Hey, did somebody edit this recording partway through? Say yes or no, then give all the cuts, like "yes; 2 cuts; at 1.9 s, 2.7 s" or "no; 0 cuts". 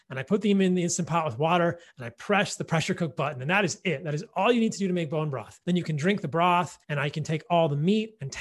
yes; 2 cuts; at 5.6 s, 6.8 s